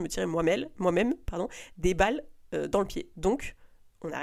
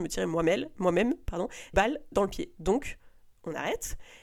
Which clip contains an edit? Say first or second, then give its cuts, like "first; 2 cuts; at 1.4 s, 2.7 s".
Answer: second; 2 cuts; at 1.7 s, 2.1 s